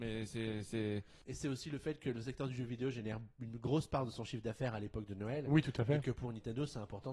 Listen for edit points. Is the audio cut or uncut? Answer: uncut